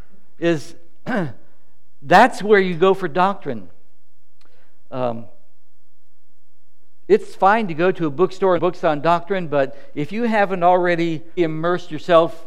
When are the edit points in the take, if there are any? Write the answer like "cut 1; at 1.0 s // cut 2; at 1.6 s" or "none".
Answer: cut 1; at 8.6 s // cut 2; at 11.4 s